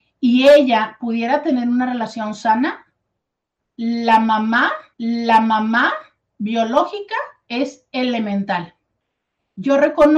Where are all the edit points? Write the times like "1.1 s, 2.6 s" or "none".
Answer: 4.9 s